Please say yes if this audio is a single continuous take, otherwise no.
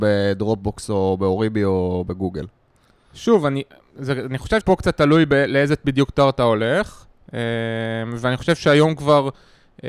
no